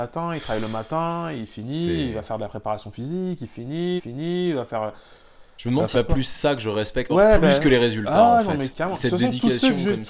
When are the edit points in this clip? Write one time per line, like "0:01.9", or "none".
0:04.0
0:05.9
0:07.1
0:08.7